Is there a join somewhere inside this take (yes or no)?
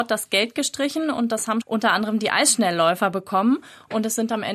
yes